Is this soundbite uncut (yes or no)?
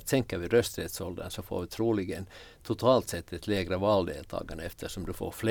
yes